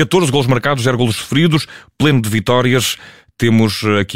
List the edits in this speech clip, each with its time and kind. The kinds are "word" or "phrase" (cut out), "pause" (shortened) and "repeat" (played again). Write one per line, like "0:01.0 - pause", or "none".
none